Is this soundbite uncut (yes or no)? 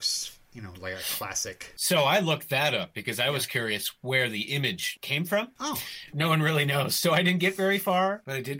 yes